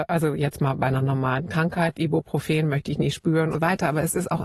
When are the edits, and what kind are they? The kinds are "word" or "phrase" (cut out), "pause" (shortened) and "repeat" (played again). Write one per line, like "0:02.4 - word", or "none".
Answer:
0:01.9 - word
0:03.5 - word